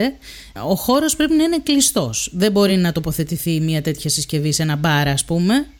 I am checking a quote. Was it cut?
no; 0 cuts

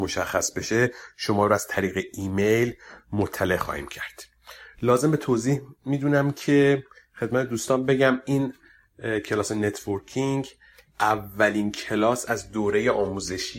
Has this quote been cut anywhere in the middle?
no; 0 cuts

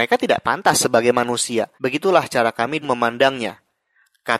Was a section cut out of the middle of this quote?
yes; 2 cuts; at 1.8 s, 2.8 s

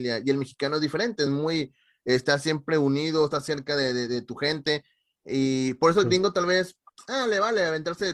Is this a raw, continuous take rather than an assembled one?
yes; 0 cuts

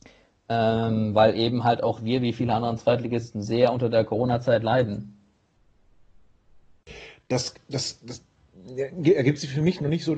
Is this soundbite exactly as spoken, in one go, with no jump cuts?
yes; 0 cuts

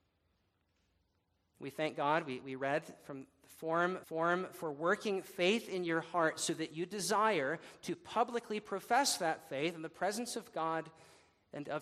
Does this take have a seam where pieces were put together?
yes; 1 cut; at 4.0 s

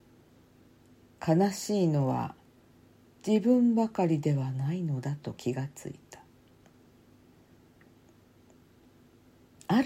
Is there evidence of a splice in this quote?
no; 0 cuts

